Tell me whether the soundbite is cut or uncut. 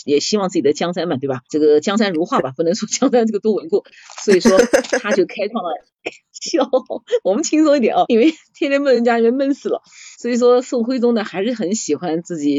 cut